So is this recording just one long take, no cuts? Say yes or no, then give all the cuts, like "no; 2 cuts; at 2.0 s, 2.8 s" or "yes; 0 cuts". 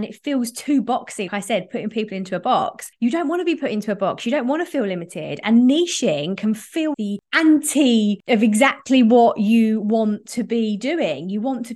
no; 2 cuts; at 1.3 s, 6.9 s